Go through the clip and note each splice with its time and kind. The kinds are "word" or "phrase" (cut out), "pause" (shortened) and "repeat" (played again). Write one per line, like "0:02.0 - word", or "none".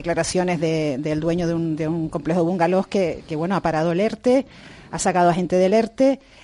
none